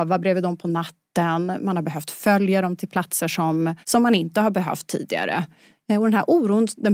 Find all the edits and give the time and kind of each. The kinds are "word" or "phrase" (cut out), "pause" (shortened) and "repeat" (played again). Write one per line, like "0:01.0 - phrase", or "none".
0:03.8 - pause